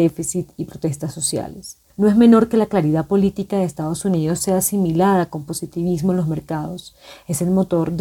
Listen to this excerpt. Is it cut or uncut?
cut